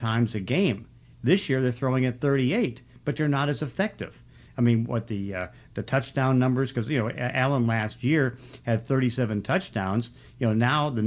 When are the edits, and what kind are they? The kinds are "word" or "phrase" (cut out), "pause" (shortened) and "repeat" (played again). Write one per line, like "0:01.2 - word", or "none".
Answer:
none